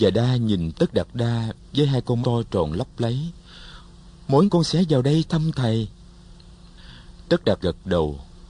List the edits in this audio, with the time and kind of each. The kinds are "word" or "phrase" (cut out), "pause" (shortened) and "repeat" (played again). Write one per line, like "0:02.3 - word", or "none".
0:02.2 - word
0:04.5 - word
0:07.6 - word